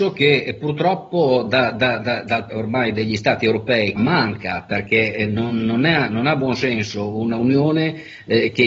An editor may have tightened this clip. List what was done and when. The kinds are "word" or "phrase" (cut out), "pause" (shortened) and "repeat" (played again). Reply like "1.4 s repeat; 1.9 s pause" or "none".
2.5 s phrase; 4.0 s phrase